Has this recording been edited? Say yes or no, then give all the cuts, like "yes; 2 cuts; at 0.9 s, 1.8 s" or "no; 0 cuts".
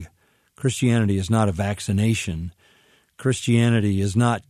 no; 0 cuts